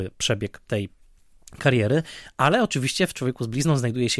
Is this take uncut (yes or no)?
yes